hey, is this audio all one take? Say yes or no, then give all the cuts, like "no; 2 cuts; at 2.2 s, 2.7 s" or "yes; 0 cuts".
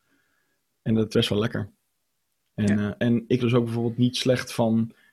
no; 3 cuts; at 1.1 s, 3.0 s, 3.4 s